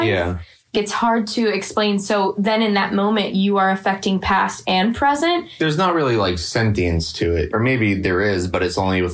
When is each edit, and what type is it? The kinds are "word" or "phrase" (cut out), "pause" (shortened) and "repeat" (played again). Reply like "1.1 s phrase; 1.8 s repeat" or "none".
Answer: none